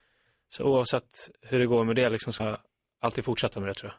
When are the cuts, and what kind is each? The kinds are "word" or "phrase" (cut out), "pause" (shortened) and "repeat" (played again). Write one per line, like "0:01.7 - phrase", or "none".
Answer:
0:01.4 - pause
0:02.4 - word